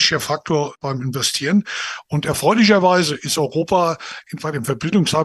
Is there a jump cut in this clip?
no; 0 cuts

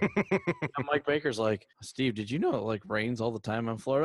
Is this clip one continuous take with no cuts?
no; 1 cut; at 1.7 s

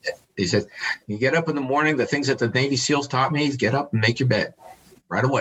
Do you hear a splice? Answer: no; 0 cuts

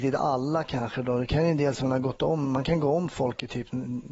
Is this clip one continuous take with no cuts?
yes; 0 cuts

